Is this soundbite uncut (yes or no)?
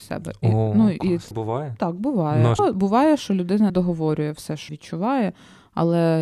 no